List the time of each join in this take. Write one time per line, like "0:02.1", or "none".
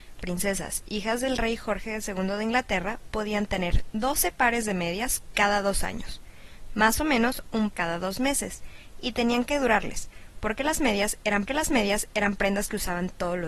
0:07.7
0:11.5